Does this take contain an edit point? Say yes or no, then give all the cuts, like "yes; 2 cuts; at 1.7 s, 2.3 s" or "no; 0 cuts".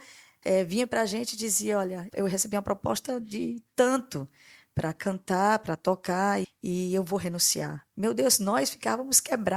yes; 2 cuts; at 2.1 s, 6.4 s